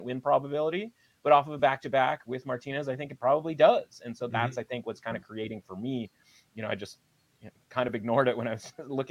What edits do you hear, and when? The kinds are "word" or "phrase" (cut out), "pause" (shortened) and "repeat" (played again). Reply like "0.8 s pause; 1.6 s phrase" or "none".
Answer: none